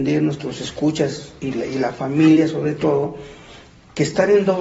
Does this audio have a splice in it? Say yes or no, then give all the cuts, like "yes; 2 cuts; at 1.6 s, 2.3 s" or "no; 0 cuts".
no; 0 cuts